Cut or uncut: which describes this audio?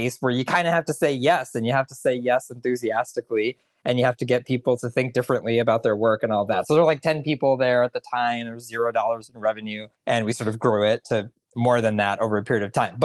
cut